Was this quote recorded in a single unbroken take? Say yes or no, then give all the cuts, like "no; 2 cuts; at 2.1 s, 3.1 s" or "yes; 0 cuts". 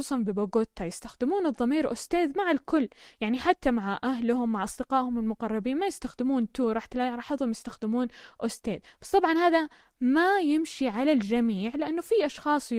yes; 0 cuts